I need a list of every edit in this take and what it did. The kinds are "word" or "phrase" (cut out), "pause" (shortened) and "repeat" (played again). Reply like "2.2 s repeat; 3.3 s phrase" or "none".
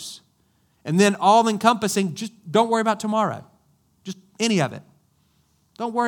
none